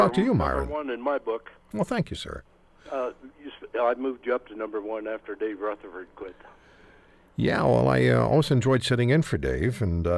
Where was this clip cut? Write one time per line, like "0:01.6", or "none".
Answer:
none